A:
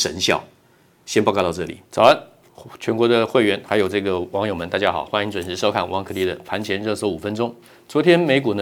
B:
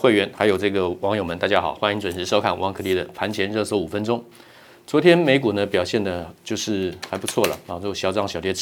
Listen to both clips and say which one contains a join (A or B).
A